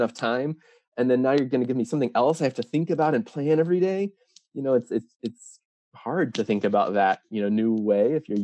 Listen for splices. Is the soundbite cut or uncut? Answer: uncut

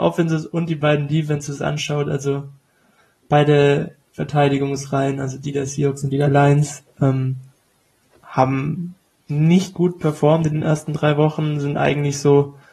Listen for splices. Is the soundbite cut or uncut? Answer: uncut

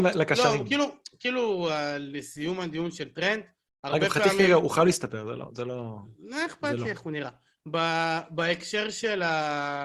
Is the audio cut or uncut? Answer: uncut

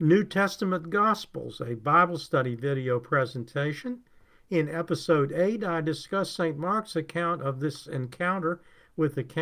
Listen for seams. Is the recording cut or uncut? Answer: uncut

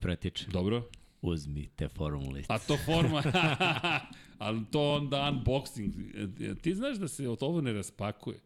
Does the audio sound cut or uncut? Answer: uncut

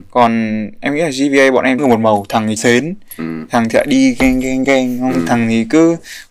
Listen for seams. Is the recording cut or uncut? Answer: cut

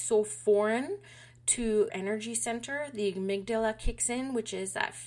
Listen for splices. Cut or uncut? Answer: cut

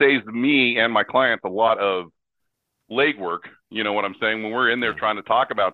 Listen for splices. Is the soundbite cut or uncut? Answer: uncut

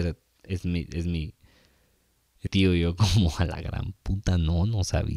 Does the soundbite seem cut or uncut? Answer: cut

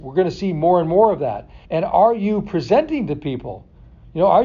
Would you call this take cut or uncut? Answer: cut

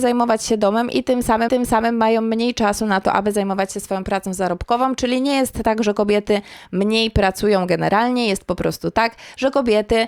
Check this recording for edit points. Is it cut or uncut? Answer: cut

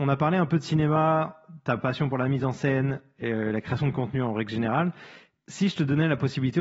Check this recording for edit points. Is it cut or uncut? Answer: uncut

